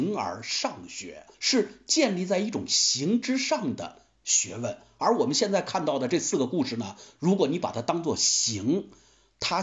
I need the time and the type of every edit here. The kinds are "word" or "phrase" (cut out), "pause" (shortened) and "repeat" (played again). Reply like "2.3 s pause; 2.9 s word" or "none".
1.3 s pause